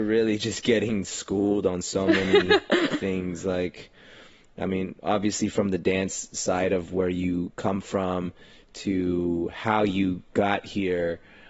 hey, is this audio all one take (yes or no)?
yes